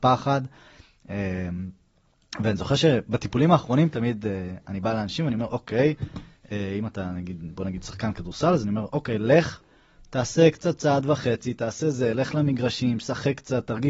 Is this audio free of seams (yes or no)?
yes